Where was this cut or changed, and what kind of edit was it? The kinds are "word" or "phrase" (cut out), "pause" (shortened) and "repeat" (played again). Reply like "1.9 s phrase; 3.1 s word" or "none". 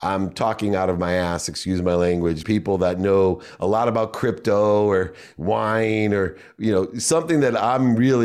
2.4 s word

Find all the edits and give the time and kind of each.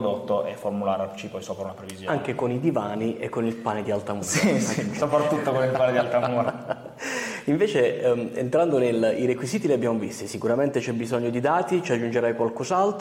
none

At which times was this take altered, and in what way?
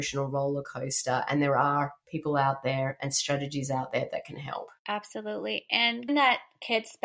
4.8 s pause; 6.1 s word

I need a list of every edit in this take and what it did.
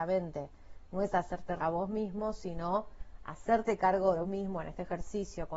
1.6 s word; 4.2 s word

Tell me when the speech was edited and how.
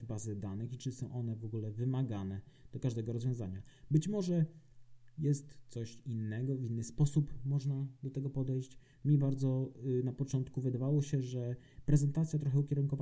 none

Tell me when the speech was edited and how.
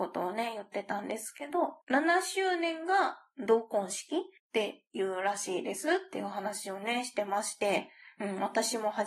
1.8 s pause; 4.4 s pause

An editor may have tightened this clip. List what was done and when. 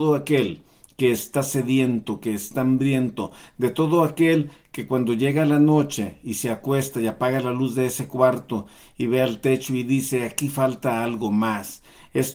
none

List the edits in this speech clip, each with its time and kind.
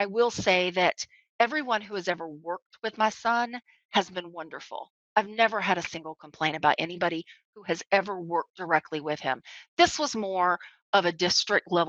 none

